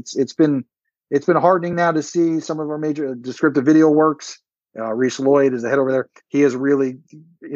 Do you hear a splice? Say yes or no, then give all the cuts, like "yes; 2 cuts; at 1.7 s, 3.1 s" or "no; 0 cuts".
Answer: no; 0 cuts